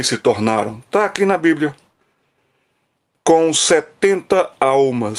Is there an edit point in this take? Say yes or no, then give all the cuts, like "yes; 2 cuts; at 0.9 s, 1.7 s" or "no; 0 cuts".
no; 0 cuts